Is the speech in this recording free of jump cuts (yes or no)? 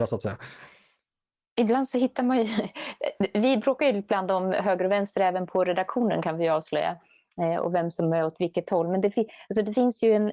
yes